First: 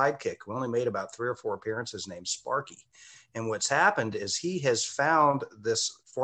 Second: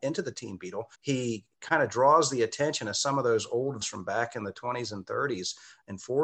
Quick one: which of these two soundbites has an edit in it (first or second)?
second